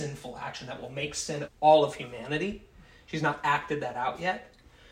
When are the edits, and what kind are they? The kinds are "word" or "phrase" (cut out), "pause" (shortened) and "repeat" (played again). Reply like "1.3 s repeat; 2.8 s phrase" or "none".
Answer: 1.4 s word